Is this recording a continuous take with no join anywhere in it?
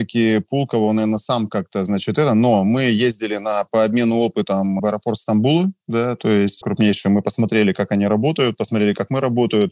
no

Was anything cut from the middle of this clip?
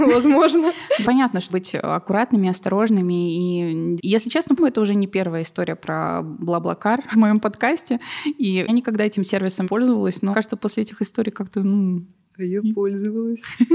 yes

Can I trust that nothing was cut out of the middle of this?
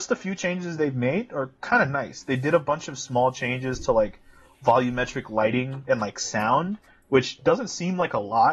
yes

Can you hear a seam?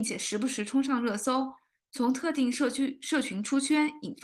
no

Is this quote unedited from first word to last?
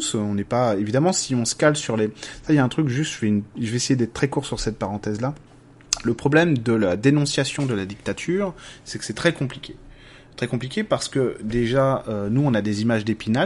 yes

